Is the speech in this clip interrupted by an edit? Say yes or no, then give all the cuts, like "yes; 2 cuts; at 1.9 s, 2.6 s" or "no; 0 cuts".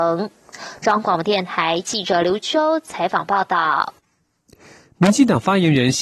no; 0 cuts